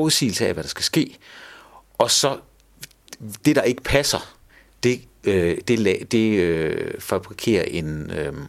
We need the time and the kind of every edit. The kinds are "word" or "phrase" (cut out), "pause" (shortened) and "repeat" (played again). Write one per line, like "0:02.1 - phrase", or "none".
none

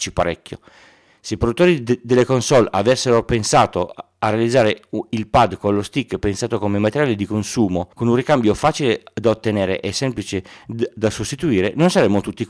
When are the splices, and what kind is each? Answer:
0:07.9 - pause

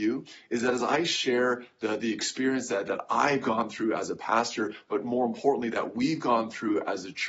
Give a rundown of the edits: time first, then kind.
none

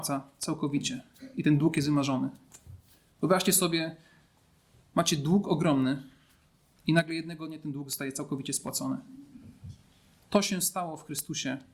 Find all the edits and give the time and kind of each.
none

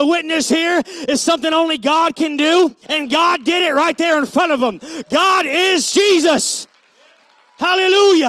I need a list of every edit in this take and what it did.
0:02.8 - pause

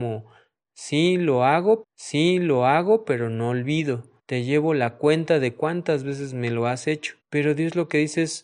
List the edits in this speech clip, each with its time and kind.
0:01.8 - repeat
0:04.2 - pause
0:07.2 - pause

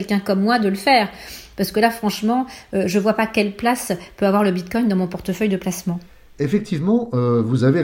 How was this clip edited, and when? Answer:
none

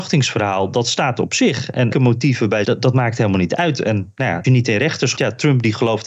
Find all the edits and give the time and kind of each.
0:01.9 - phrase
0:02.6 - word
0:04.4 - word
0:05.2 - word

